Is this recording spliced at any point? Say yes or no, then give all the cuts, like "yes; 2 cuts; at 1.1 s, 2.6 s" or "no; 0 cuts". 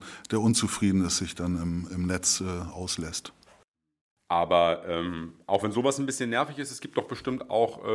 no; 0 cuts